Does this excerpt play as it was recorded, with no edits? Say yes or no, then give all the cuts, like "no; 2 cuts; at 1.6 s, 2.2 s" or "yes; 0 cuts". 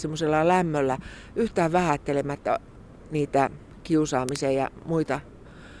yes; 0 cuts